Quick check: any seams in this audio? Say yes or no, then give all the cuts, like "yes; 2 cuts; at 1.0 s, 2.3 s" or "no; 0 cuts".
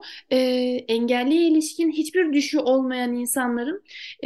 no; 0 cuts